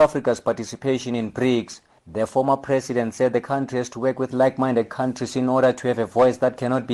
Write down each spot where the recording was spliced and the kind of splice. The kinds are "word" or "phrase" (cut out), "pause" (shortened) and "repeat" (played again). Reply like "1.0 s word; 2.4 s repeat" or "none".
none